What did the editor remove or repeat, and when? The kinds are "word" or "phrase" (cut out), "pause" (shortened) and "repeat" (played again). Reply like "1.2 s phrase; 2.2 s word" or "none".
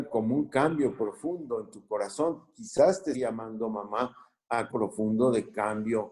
3.1 s word; 4.7 s phrase